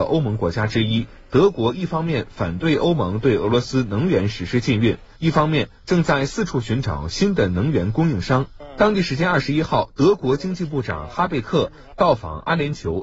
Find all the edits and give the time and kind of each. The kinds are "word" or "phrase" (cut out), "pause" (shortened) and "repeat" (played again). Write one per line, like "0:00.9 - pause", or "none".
0:05.1 - pause